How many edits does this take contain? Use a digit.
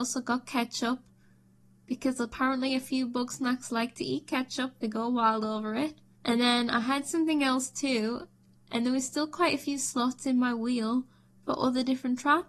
0